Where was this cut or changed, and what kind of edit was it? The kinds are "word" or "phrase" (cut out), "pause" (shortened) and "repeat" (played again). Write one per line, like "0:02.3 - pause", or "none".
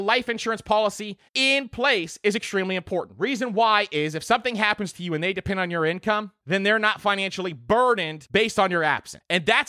0:01.3 - pause